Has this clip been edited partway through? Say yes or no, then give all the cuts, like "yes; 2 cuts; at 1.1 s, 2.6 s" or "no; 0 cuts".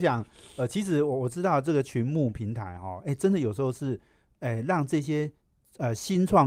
no; 0 cuts